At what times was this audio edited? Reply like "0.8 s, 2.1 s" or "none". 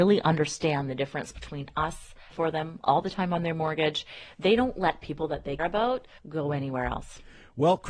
2.3 s, 5.6 s, 6.2 s